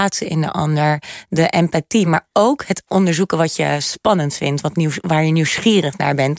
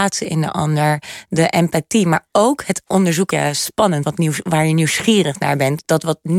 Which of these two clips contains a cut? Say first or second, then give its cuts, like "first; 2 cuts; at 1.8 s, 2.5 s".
second; 2 cuts; at 3.3 s, 4.0 s